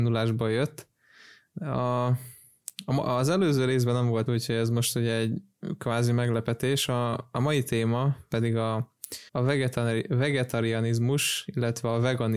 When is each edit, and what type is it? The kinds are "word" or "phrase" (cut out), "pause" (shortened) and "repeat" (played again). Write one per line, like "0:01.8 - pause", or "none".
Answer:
0:04.3 - word
0:09.3 - pause

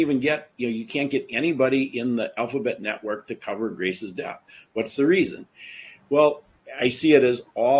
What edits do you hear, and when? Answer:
none

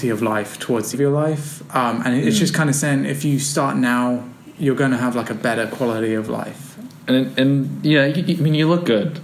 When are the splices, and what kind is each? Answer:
0:00.9 - phrase

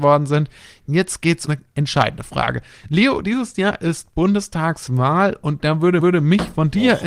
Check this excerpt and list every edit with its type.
0:01.5 - word
0:06.0 - repeat

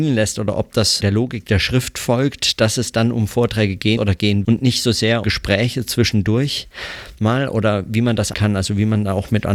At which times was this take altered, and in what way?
0:01.0 - word
0:04.0 - word
0:04.4 - word
0:05.2 - word
0:08.3 - word

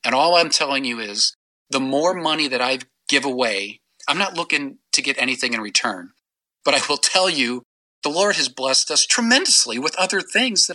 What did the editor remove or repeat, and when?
none

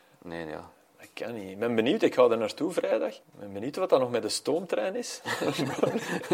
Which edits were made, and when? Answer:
0:03.2 - pause

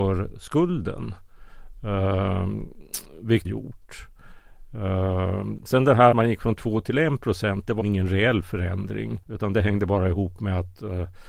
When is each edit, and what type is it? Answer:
0:03.4 - phrase
0:06.1 - word
0:07.8 - word
0:09.2 - pause

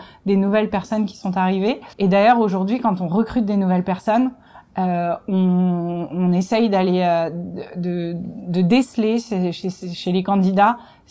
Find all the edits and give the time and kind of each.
0:01.9 - pause

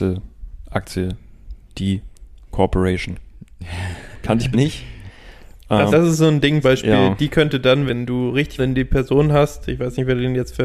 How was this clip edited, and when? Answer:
0:02.5 - word
0:04.5 - word
0:05.9 - word
0:06.6 - word
0:07.9 - word
0:08.6 - word

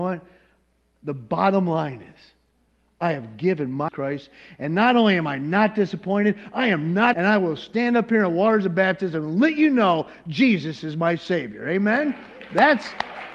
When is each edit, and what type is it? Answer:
0:03.9 - phrase
0:07.1 - word

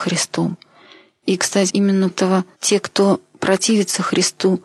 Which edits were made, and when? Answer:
0:01.7 - word
0:02.1 - word
0:02.5 - pause

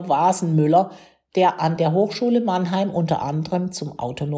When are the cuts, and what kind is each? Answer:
none

